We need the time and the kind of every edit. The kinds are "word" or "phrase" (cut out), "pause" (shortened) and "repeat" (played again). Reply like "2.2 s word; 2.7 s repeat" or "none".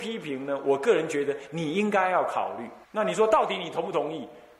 2.8 s pause